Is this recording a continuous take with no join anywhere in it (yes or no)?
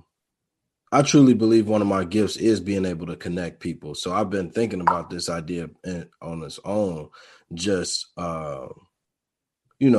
yes